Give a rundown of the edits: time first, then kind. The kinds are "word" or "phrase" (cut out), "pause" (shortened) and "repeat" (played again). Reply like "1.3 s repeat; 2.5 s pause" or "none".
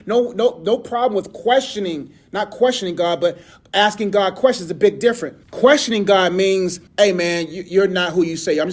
5.4 s pause; 6.9 s pause